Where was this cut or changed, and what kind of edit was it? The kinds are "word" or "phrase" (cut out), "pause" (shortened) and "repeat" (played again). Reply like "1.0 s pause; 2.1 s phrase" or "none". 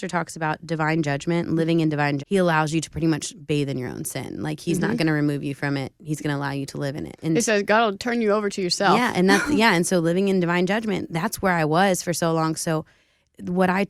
2.2 s phrase